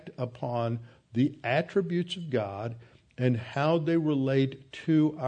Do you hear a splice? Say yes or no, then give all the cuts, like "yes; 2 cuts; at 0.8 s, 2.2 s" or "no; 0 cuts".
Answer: no; 0 cuts